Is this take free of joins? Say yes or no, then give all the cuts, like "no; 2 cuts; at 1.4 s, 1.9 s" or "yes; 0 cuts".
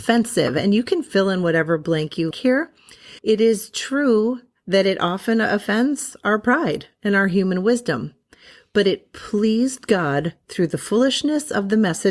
no; 2 cuts; at 2.3 s, 3.2 s